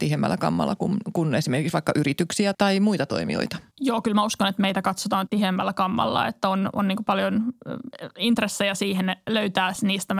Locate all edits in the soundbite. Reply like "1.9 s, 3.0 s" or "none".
2.5 s, 3.7 s, 5.3 s